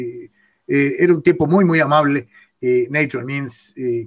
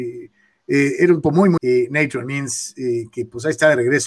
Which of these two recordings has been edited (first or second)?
second